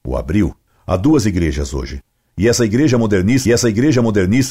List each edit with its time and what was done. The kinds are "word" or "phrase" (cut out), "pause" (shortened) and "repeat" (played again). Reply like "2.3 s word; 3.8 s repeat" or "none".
3.4 s repeat